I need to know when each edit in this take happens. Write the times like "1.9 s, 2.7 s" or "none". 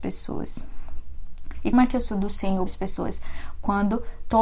1.7 s, 2.1 s, 2.7 s